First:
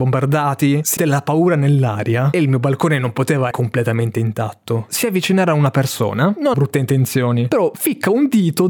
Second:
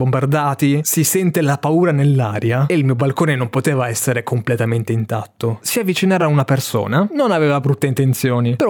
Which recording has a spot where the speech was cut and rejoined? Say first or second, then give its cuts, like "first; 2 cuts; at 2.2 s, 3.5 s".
first; 3 cuts; at 1.0 s, 3.5 s, 6.5 s